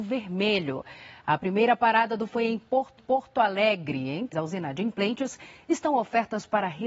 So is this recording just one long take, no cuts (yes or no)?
no